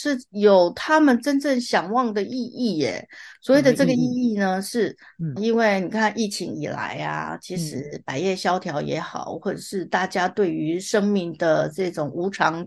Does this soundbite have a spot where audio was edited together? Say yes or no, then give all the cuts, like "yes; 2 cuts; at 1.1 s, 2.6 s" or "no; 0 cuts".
yes; 1 cut; at 5.4 s